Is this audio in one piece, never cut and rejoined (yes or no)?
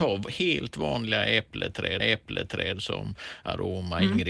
no